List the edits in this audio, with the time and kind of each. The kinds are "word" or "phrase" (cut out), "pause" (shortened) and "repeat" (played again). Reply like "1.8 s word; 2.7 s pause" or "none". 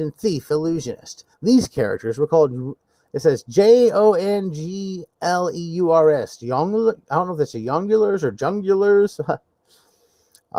1.3 s pause